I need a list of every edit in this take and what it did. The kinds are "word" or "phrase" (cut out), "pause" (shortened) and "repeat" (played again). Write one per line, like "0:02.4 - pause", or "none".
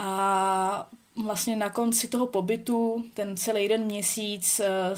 none